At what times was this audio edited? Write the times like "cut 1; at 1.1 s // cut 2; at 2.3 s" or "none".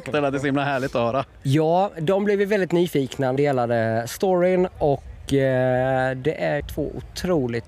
cut 1; at 3.4 s // cut 2; at 6.6 s